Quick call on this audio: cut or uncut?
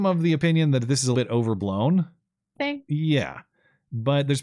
cut